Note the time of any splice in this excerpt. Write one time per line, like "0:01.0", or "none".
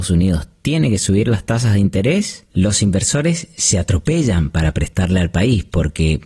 0:02.5